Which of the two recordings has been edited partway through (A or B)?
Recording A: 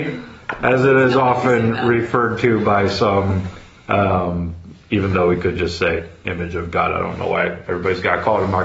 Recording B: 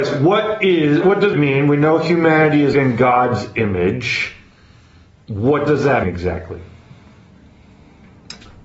B